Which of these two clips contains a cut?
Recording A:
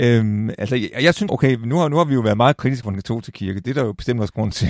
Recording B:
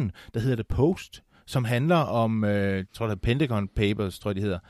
A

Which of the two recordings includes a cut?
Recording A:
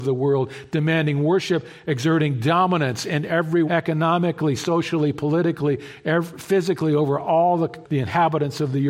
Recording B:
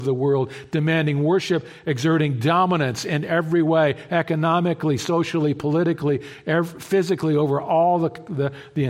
A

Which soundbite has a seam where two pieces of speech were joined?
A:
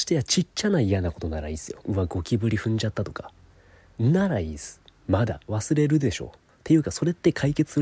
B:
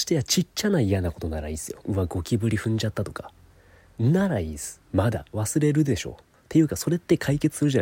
B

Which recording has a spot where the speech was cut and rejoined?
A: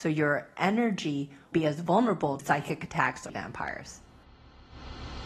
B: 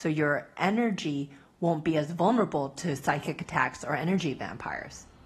A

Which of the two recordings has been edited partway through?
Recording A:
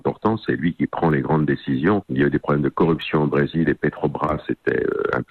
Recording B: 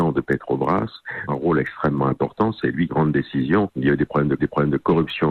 B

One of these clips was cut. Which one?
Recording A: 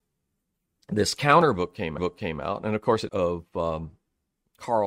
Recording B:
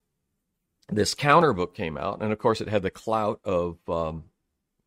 A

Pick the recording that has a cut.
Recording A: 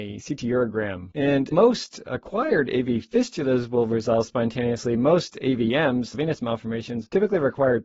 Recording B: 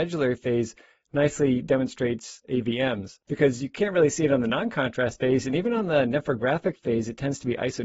A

